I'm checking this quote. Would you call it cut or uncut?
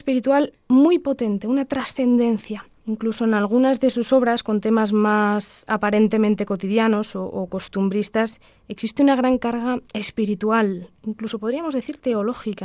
cut